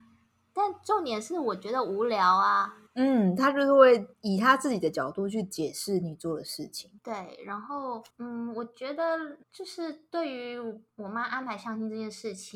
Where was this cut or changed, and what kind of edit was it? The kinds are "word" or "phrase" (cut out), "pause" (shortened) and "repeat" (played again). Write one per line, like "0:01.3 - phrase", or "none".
0:02.9 - pause
0:04.1 - pause
0:07.0 - pause
0:08.1 - pause
0:09.4 - pause